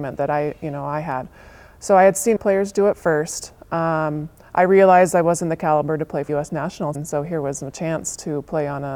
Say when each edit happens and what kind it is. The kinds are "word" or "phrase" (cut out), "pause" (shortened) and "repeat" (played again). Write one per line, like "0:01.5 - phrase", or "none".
0:02.4 - word
0:06.3 - word
0:06.9 - word